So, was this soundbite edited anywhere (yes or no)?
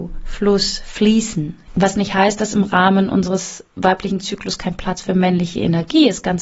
no